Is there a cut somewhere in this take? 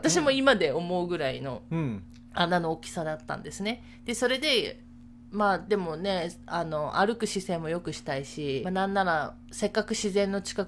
yes; 1 cut; at 8.6 s

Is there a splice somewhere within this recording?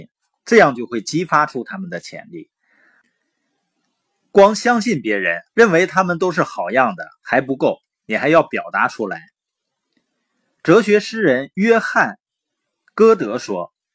yes; 1 cut; at 5.5 s

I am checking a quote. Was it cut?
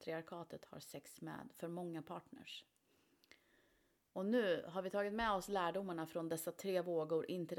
no; 0 cuts

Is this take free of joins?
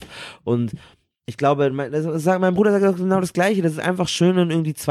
yes; 0 cuts

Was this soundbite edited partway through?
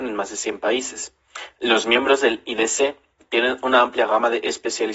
no; 0 cuts

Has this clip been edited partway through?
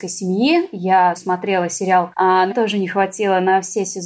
yes; 3 cuts; at 1.1 s, 2.1 s, 2.5 s

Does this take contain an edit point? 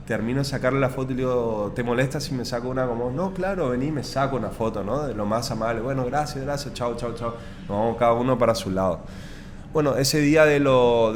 no; 0 cuts

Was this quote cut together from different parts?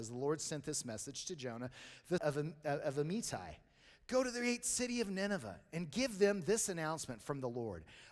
yes; 1 cut; at 2.2 s

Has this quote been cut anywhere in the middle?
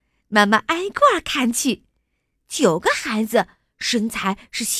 no; 0 cuts

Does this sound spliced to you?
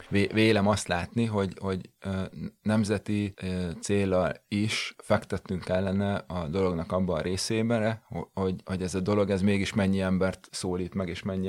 yes; 2 cuts; at 3.8 s, 8.6 s

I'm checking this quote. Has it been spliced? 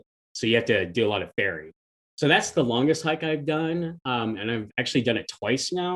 no; 0 cuts

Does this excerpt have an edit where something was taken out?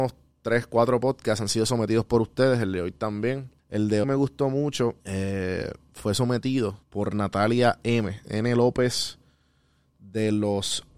yes; 4 cuts; at 3.6 s, 4.0 s, 5.0 s, 6.8 s

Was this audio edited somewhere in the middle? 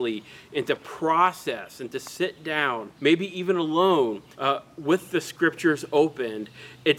yes; 2 cuts; at 3.0 s, 4.3 s

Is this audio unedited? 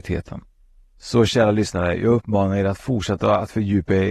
yes; 0 cuts

